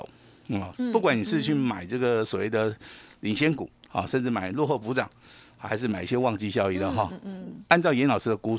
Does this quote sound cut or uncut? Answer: uncut